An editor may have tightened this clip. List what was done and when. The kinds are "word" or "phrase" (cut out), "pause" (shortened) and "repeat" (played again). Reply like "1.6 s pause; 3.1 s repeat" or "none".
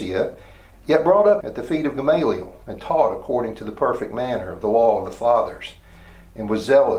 1.4 s phrase